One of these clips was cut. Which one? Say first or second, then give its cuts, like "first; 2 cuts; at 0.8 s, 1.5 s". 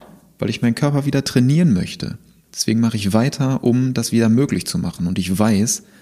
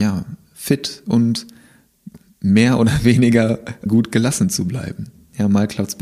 second; 1 cut; at 3.9 s